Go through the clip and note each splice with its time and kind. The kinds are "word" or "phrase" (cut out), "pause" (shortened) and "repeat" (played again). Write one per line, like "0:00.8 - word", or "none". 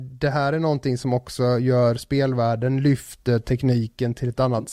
none